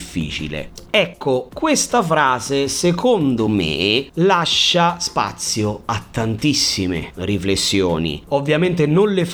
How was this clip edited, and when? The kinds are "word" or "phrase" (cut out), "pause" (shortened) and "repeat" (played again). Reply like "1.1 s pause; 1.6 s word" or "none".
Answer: none